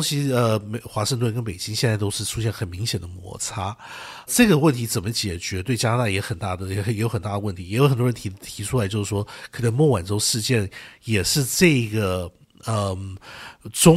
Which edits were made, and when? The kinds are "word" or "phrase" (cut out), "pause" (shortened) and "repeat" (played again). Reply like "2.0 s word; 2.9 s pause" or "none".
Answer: 4.3 s word